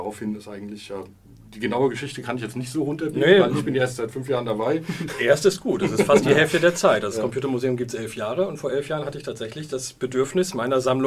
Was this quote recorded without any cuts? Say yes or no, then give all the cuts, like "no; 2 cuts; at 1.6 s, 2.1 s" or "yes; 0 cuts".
yes; 0 cuts